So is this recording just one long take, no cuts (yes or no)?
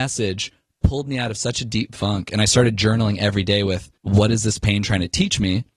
no